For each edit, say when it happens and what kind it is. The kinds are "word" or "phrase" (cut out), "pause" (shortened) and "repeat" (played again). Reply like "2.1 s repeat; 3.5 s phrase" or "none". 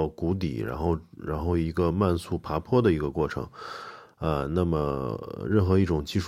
none